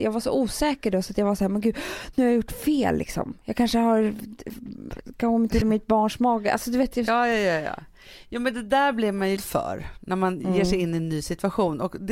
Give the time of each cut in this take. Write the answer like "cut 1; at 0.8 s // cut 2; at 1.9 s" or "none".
cut 1; at 5.6 s // cut 2; at 9.4 s